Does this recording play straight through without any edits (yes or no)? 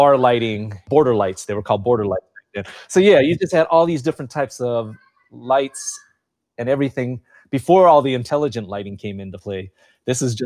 yes